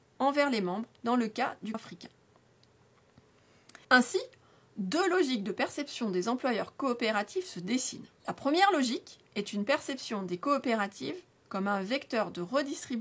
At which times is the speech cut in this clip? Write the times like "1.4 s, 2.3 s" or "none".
1.0 s, 1.7 s, 3.8 s, 8.2 s